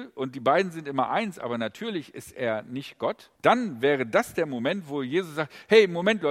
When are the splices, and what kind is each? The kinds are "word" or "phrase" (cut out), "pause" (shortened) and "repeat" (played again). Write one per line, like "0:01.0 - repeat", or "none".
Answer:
0:03.4 - pause